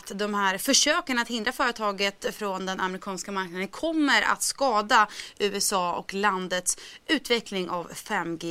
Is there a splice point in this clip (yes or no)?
no